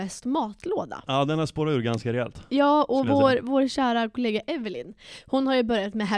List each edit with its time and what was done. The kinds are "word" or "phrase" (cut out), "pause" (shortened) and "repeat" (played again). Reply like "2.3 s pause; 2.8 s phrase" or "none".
none